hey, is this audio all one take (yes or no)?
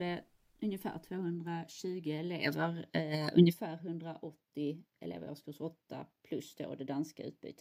yes